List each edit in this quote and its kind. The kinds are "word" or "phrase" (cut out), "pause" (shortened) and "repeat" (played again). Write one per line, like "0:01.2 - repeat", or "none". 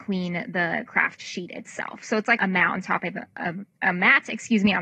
0:02.4 - word
0:03.7 - pause

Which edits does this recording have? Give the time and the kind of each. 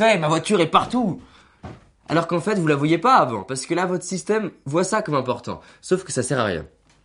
none

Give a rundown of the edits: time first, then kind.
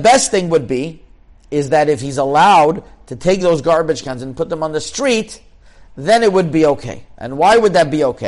none

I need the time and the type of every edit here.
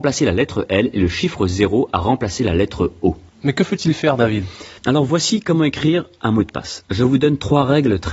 0:04.8 - pause

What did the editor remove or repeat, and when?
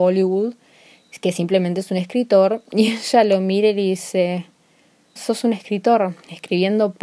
0:05.2 - word

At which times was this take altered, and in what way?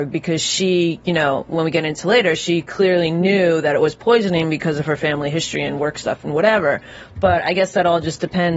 none

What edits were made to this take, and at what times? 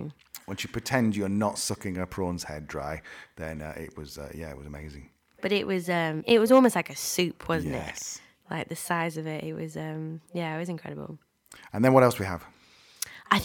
none

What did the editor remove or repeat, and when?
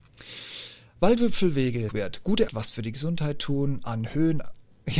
0:01.9 - phrase
0:02.5 - word

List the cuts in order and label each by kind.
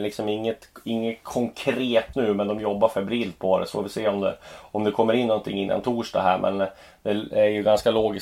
0:02.1 - word

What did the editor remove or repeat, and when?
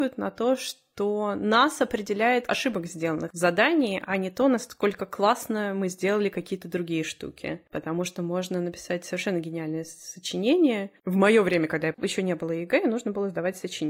0:02.5 - word
0:11.9 - phrase

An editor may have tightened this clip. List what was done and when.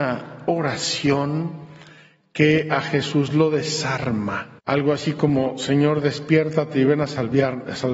0:04.6 - pause

